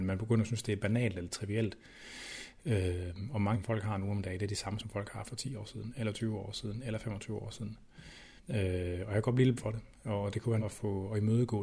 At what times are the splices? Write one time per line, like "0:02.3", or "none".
0:03.5
0:04.8
0:08.4
0:09.6
0:10.6